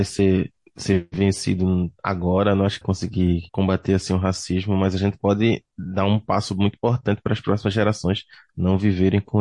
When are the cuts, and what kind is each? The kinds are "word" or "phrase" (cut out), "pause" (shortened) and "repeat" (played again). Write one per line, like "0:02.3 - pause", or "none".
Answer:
0:02.8 - phrase
0:03.5 - pause